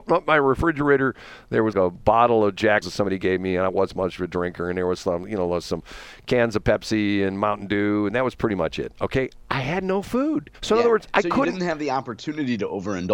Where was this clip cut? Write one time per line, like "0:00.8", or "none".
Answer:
0:01.7
0:02.8
0:10.5